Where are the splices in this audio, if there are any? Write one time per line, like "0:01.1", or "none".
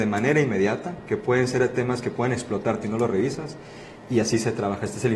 0:02.8